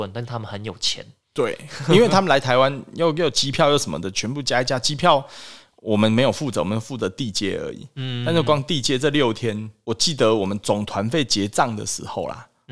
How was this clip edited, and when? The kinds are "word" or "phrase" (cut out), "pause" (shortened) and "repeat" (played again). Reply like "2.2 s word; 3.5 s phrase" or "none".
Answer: none